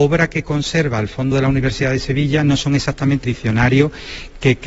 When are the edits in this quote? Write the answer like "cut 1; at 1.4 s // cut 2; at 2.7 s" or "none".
cut 1; at 1.3 s // cut 2; at 3.2 s